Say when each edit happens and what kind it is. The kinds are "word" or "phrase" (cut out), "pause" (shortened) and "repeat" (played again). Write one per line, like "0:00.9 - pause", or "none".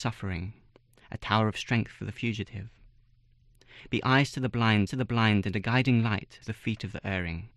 0:04.9 - repeat
0:06.4 - word